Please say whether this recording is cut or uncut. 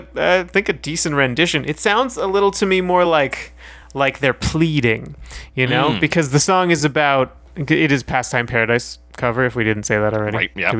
uncut